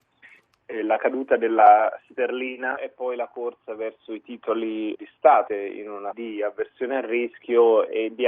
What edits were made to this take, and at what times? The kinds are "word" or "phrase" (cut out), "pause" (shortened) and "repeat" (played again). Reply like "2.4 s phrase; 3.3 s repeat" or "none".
2.8 s word; 5.0 s word; 5.5 s word; 6.1 s word